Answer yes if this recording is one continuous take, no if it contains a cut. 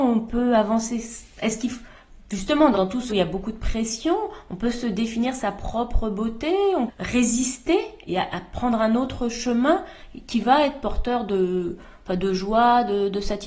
no